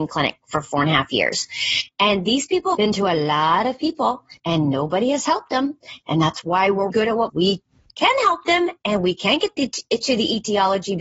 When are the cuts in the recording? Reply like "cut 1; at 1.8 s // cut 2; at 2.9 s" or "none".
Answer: cut 1; at 2.7 s // cut 2; at 4.4 s // cut 3; at 6.9 s // cut 4; at 7.3 s